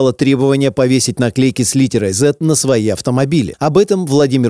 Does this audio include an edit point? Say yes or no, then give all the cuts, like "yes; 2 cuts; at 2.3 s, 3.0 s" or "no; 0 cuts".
no; 0 cuts